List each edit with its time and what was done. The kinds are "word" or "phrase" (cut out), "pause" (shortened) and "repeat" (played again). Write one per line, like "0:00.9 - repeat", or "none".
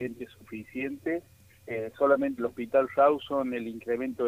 0:02.4 - word